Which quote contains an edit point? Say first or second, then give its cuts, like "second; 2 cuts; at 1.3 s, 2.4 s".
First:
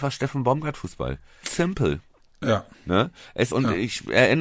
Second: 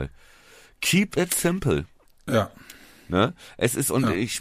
first; 3 cuts; at 1.4 s, 2.7 s, 3.5 s